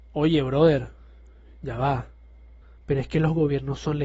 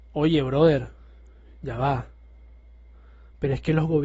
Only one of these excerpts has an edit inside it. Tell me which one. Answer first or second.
first